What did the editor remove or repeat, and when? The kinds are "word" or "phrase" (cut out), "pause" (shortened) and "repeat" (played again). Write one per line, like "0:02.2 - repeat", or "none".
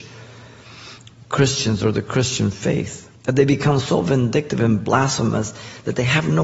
0:03.2 - pause